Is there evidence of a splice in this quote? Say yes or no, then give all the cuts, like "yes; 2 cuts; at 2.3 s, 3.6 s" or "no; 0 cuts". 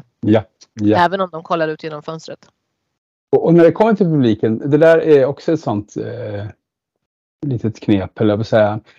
no; 0 cuts